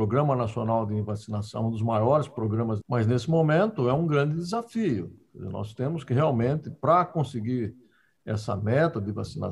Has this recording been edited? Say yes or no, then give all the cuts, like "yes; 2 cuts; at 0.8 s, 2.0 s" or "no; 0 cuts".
yes; 1 cut; at 2.8 s